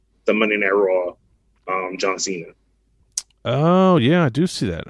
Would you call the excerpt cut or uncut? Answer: uncut